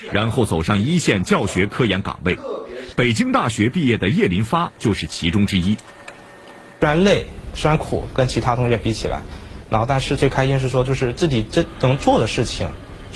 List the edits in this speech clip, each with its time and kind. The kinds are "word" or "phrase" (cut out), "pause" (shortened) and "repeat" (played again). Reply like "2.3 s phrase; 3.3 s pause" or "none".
none